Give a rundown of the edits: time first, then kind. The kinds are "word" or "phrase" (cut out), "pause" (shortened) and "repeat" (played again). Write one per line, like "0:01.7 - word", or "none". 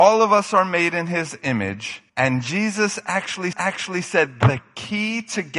0:02.1 - pause
0:03.5 - repeat